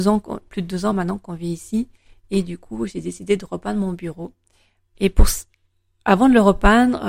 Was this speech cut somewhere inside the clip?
no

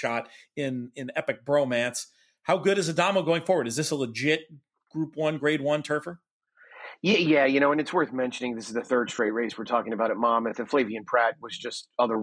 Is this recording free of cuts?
yes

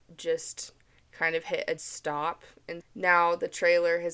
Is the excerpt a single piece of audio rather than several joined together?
no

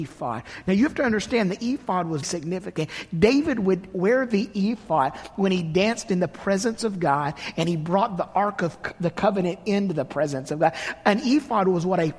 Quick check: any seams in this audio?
yes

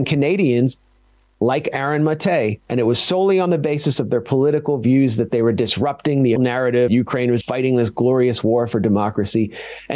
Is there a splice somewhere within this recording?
yes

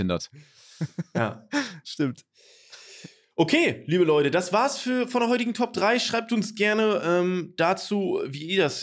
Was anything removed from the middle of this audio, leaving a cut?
no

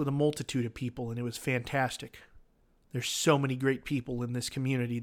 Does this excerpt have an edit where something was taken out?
yes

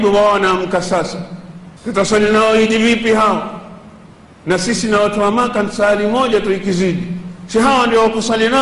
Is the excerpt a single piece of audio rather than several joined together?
no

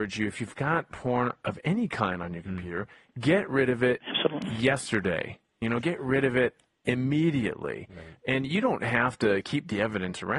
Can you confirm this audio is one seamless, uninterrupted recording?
yes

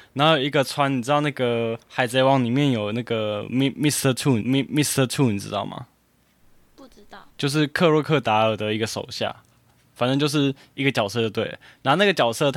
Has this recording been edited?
yes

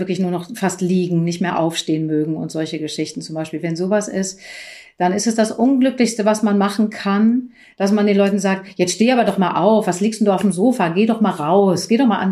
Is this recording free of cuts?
yes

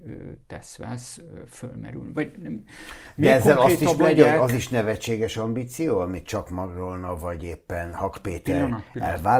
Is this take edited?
no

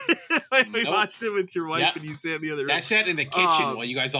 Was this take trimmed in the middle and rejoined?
no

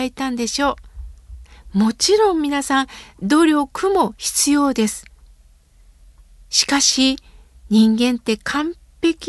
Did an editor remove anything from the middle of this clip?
no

